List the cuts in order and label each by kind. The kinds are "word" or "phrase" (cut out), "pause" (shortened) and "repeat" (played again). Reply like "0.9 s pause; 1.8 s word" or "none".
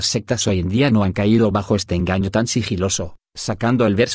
none